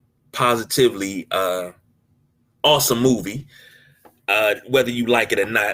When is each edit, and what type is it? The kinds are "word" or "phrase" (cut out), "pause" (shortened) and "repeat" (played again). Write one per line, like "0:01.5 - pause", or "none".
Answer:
none